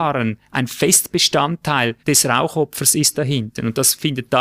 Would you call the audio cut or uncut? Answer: cut